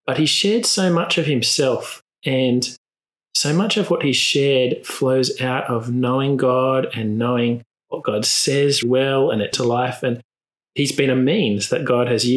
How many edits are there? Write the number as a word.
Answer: two